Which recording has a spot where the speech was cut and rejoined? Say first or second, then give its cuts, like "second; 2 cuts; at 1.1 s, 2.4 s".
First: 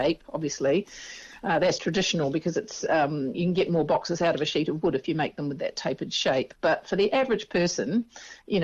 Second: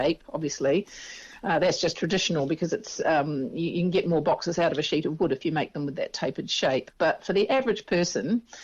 first; 2 cuts; at 1.8 s, 3.3 s